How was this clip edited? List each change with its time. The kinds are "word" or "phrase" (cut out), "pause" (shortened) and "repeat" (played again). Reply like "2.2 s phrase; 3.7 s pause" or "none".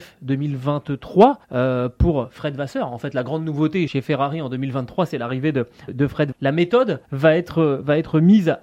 1.4 s pause; 3.9 s word; 5.9 s word; 6.3 s phrase; 7.0 s pause